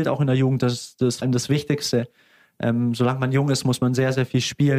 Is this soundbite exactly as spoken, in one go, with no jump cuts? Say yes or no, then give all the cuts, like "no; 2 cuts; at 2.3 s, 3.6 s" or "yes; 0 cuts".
no; 1 cut; at 1.2 s